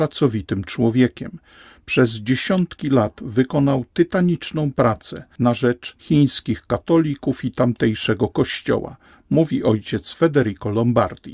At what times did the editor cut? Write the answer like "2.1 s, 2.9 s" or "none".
none